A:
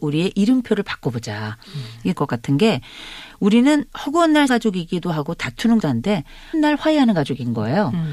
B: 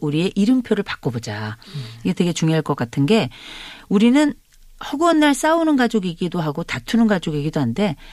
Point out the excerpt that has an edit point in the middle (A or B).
A